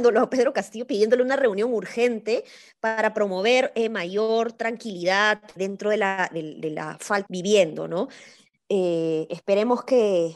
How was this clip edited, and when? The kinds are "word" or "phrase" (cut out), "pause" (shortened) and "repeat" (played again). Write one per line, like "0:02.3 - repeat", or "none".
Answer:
0:05.6 - word
0:07.3 - phrase